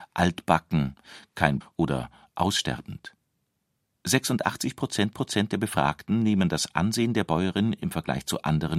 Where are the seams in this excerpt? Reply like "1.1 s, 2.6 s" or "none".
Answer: 1.6 s, 5.1 s